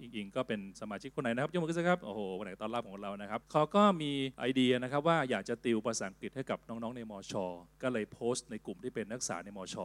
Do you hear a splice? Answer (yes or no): yes